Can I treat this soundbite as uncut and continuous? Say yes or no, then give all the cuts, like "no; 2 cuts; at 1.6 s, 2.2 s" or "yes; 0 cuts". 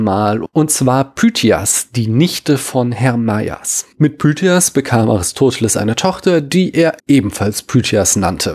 no; 1 cut; at 7.0 s